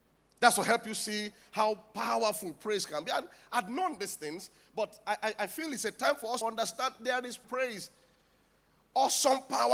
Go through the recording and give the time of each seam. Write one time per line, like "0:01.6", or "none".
0:06.4
0:07.4